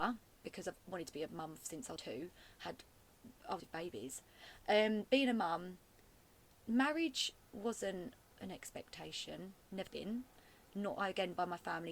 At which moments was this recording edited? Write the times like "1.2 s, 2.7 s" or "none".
2.0 s, 3.6 s, 9.9 s